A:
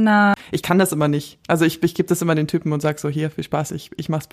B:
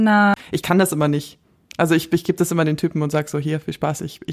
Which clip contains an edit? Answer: A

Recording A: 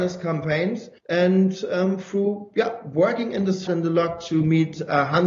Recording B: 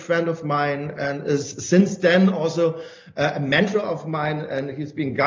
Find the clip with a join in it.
A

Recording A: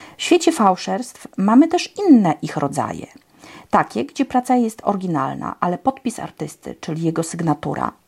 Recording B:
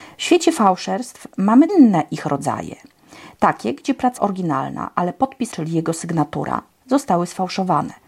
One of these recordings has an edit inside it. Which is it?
B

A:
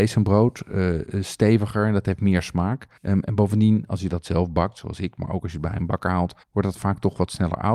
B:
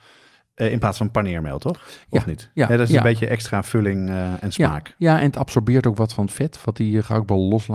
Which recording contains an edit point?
A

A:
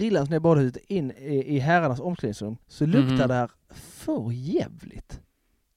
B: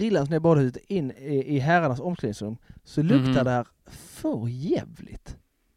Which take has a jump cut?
A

